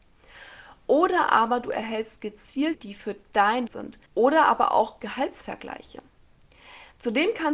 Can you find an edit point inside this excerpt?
yes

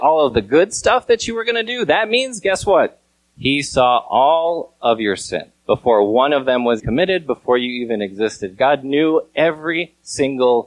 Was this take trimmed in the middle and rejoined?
yes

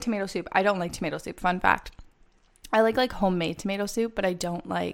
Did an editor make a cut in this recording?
no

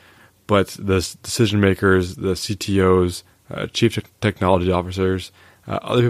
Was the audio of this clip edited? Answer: no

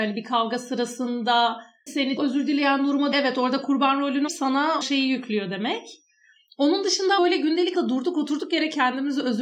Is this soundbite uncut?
no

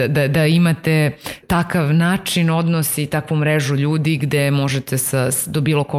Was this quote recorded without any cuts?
no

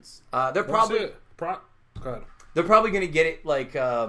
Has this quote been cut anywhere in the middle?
no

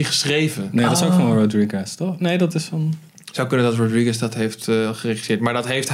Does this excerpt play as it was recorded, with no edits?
no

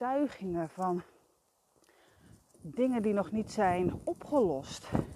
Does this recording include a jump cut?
no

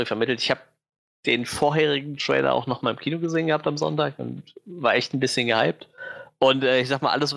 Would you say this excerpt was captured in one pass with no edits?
yes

